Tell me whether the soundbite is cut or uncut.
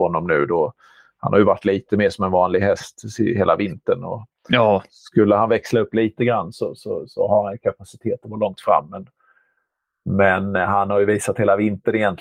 uncut